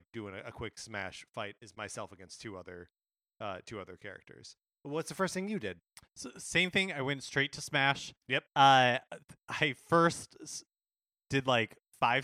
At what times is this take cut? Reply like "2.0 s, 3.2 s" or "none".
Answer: none